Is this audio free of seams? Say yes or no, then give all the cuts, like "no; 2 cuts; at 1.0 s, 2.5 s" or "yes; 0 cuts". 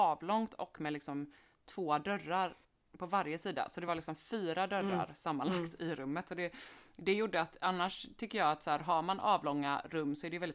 yes; 0 cuts